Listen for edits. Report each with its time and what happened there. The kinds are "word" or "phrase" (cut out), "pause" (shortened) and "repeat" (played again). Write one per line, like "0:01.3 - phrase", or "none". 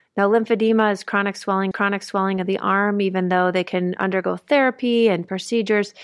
0:01.7 - repeat